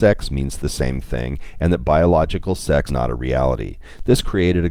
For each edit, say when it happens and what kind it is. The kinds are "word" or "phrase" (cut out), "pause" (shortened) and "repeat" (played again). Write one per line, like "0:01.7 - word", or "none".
0:02.9 - word